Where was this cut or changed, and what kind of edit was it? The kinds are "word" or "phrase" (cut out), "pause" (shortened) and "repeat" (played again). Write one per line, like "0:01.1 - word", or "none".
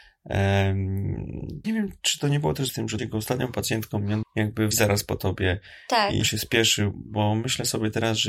0:01.6 - word
0:02.7 - word
0:03.0 - word
0:04.2 - word
0:04.7 - word
0:06.2 - word
0:06.9 - word